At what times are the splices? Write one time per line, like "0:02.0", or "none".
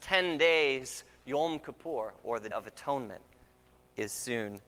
0:02.5